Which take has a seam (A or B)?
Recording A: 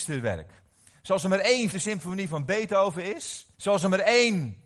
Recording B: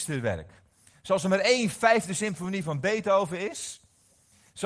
A